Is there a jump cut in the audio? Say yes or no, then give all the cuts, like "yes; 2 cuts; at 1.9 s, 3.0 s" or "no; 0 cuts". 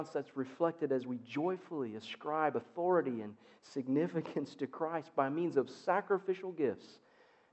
no; 0 cuts